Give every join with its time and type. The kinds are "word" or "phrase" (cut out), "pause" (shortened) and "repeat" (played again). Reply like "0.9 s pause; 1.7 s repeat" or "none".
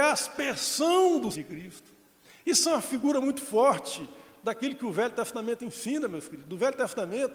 1.3 s word